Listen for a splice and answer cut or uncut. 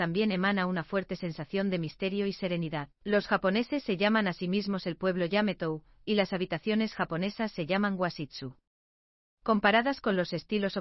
cut